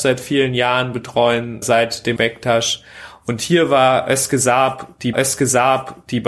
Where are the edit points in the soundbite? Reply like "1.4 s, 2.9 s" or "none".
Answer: 1.6 s, 2.2 s, 5.1 s